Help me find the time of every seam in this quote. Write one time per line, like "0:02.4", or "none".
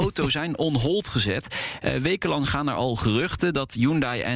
none